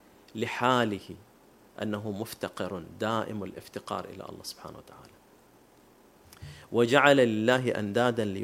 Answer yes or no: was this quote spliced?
no